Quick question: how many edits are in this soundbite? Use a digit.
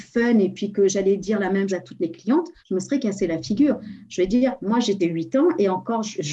3